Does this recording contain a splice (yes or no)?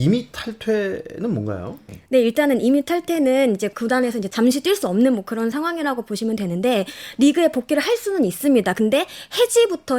no